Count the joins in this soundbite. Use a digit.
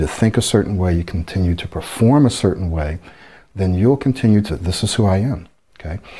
1